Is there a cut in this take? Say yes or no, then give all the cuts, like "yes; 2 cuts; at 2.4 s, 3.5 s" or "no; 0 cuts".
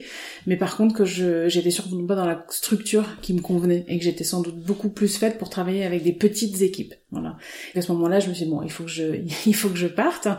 yes; 1 cut; at 7.7 s